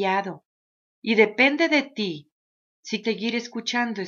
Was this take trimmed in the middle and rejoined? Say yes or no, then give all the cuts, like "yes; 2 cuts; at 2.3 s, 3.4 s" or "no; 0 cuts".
yes; 1 cut; at 3.0 s